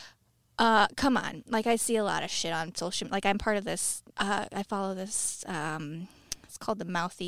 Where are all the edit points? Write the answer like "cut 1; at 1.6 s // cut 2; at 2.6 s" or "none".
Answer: cut 1; at 4.1 s